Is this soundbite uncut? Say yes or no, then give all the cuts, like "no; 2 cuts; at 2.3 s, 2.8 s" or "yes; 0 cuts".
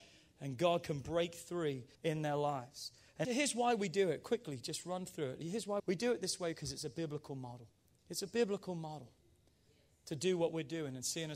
no; 4 cuts; at 1.9 s, 3.2 s, 5.8 s, 7.8 s